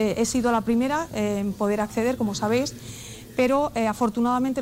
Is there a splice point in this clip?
no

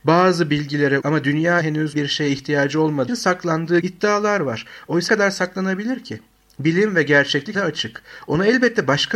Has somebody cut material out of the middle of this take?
yes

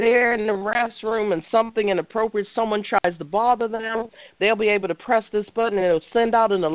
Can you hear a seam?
no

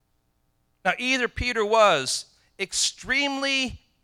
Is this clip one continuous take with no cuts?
yes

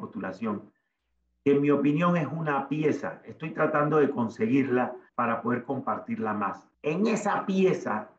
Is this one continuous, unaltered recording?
no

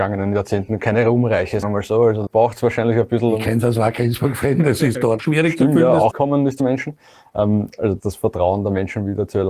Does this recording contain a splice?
yes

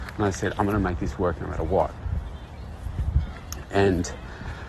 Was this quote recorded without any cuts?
yes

